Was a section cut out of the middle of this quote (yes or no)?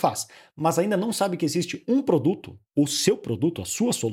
no